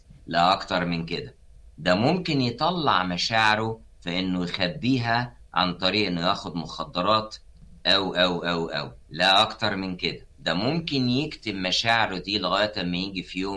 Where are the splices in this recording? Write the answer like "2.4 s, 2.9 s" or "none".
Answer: 3.9 s, 9.0 s, 10.3 s